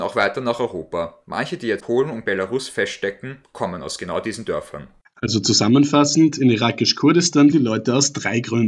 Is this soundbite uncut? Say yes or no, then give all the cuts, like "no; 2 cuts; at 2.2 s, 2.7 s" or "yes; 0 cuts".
no; 3 cuts; at 1.8 s, 5.0 s, 7.5 s